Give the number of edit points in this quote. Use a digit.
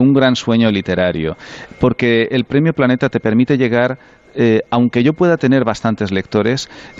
0